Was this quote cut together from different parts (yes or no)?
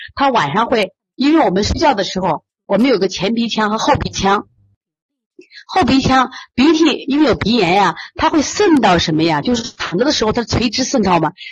no